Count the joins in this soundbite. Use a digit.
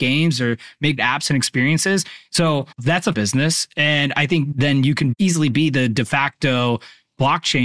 4